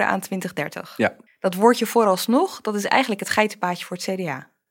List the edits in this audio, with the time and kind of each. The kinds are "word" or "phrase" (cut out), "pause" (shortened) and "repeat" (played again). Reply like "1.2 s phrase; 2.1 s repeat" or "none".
1.3 s pause